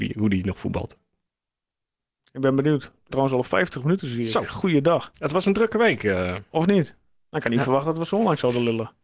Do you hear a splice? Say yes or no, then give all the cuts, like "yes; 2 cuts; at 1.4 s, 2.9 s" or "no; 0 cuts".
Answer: yes; 1 cut; at 3.1 s